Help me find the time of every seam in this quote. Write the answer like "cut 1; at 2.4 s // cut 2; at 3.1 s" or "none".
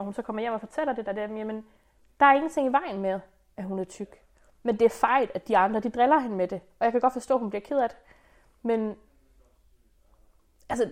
none